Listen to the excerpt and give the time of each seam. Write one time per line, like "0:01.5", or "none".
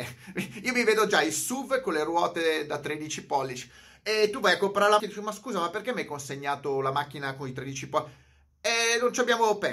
0:05.0